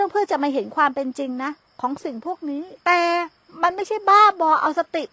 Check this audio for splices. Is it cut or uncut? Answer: cut